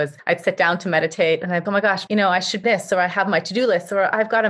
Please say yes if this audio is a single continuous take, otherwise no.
no